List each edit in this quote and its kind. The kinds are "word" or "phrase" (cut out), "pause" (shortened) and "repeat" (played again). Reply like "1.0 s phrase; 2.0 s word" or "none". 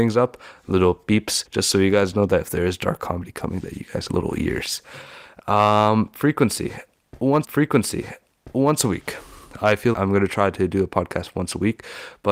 1.5 s pause; 4.1 s phrase; 7.4 s repeat; 9.9 s word